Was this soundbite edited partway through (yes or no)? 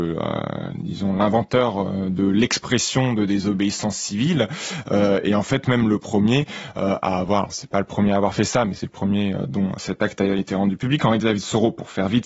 no